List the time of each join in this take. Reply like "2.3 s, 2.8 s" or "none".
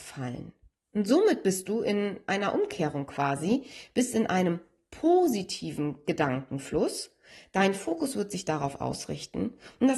none